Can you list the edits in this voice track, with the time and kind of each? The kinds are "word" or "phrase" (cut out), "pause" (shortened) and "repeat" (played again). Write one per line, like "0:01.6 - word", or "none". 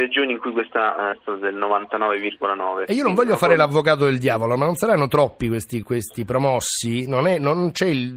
0:01.1 - phrase
0:05.8 - word